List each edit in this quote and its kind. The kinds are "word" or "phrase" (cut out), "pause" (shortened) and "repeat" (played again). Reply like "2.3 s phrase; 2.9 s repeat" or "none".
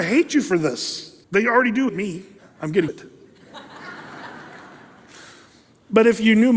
1.2 s pause; 1.9 s word; 2.4 s pause; 2.9 s phrase